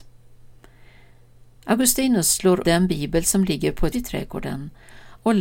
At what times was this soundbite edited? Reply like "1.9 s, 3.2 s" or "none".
2.6 s, 3.9 s